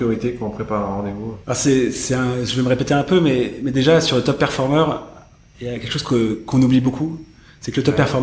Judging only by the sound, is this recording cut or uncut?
cut